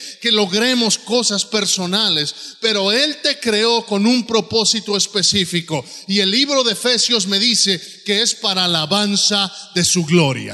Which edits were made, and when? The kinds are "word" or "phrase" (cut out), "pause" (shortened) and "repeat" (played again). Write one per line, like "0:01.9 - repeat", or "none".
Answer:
none